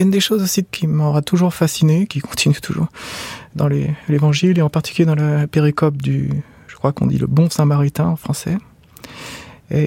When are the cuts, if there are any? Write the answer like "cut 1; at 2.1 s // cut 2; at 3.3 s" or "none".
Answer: none